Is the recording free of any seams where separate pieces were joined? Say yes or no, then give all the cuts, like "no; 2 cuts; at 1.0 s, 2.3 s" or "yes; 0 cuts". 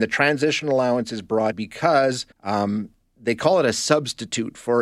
no; 2 cuts; at 1.5 s, 2.3 s